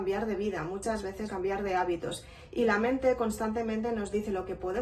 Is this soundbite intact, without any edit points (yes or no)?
no